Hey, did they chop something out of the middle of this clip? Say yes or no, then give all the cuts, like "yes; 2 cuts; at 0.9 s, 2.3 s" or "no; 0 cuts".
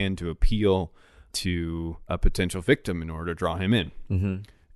no; 0 cuts